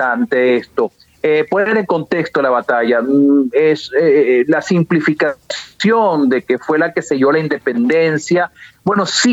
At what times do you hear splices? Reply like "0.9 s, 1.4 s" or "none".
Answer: none

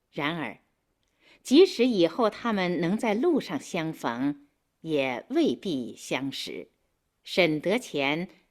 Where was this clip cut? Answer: none

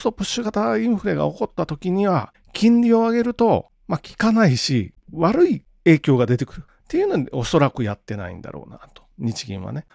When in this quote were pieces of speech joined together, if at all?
none

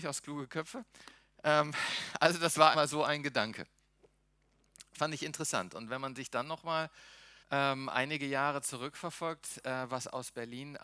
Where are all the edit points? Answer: 2.7 s, 7.4 s

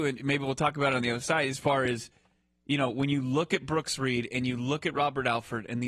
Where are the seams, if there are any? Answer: none

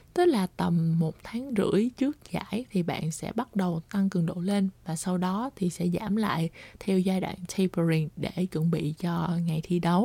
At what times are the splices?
none

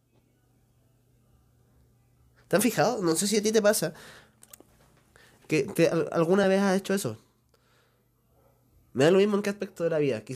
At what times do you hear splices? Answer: none

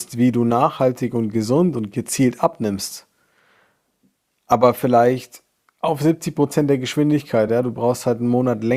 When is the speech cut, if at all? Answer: none

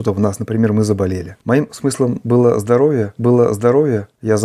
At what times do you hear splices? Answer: 1.4 s, 3.2 s

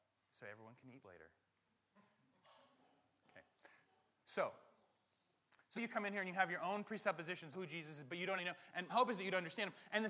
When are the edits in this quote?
1.0 s, 5.8 s, 7.5 s, 8.4 s, 8.9 s

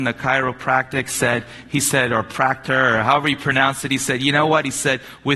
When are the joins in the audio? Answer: none

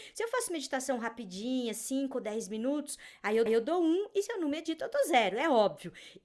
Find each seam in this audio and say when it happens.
3.5 s

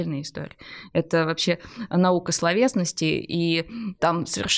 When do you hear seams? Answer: none

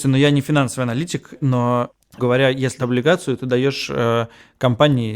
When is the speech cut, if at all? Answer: 2.2 s, 2.8 s

